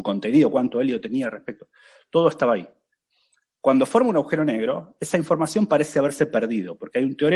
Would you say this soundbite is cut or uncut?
uncut